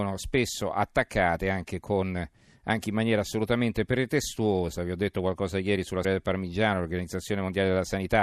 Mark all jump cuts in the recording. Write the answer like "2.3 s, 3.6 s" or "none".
6.0 s